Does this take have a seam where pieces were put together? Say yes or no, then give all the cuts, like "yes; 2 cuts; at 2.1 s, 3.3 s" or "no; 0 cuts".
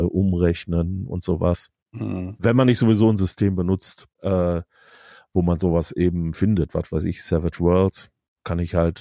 yes; 2 cuts; at 1.8 s, 4.1 s